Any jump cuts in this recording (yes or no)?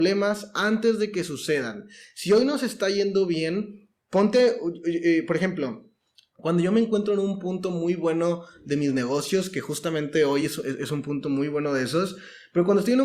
no